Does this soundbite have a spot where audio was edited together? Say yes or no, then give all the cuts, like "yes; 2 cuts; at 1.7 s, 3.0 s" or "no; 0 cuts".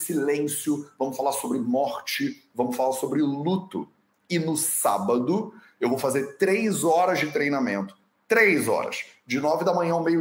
no; 0 cuts